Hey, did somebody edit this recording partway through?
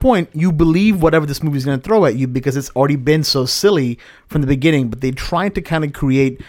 no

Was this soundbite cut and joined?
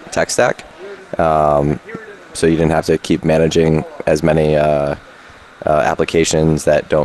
no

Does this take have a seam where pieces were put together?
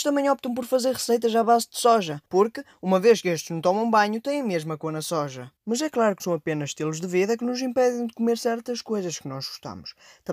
yes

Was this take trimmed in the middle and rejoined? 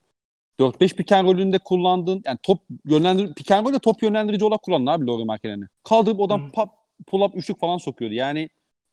yes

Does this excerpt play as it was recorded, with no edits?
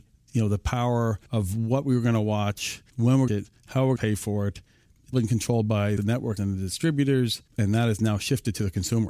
no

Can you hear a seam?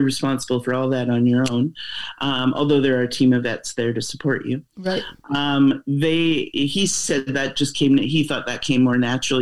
no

